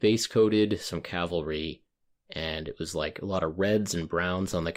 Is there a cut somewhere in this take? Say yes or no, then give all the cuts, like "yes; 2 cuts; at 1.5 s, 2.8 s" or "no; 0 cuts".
no; 0 cuts